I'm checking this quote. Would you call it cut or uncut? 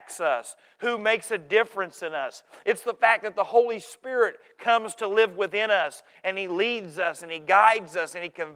uncut